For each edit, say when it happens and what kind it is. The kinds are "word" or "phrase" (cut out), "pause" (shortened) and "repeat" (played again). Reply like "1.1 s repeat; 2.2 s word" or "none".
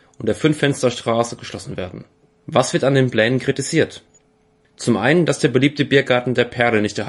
2.2 s pause